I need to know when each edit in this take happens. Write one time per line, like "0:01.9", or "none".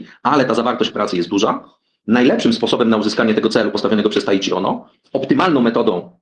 0:00.9
0:02.0